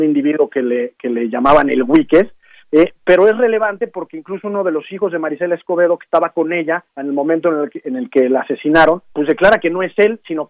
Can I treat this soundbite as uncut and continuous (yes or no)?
no